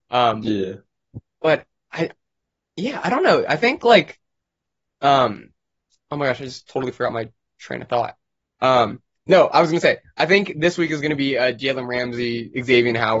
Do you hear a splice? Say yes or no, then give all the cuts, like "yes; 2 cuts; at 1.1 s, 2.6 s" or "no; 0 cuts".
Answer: no; 0 cuts